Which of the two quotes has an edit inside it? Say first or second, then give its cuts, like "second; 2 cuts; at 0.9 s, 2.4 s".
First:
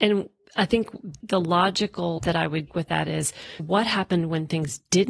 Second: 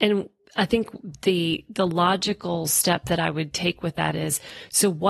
first; 4 cuts; at 1.2 s, 2.2 s, 2.7 s, 3.6 s